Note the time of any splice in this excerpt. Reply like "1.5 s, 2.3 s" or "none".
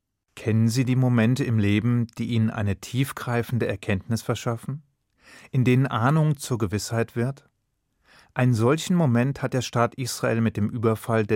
none